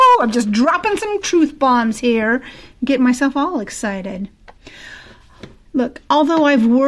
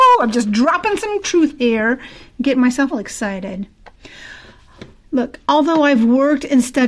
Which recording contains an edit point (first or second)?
second